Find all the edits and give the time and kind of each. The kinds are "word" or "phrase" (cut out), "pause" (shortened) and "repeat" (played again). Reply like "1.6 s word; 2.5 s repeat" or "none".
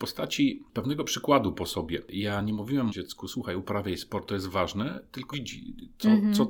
2.9 s word; 4.3 s word; 5.3 s word